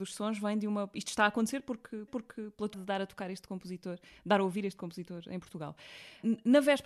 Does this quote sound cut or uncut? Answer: cut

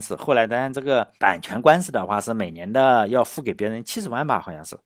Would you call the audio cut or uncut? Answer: cut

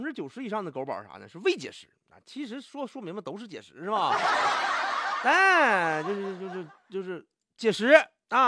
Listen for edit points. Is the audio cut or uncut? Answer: uncut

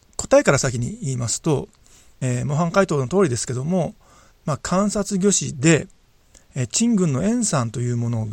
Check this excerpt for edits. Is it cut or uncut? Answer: uncut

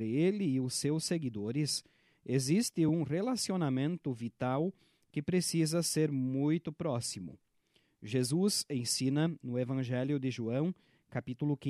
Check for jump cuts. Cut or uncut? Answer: uncut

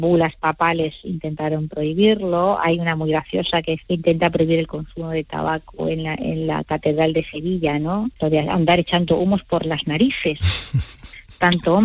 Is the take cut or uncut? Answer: cut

